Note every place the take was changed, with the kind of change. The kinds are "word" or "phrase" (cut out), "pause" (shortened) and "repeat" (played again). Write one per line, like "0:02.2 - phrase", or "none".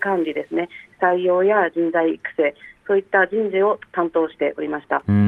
0:03.9 - pause